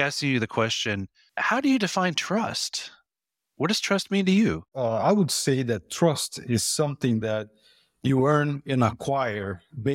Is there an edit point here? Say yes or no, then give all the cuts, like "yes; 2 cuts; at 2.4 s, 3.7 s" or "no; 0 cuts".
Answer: no; 0 cuts